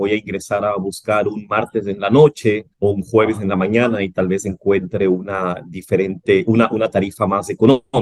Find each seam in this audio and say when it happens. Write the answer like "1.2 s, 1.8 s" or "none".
2.7 s